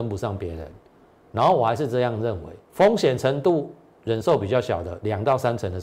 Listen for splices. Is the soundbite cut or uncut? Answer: cut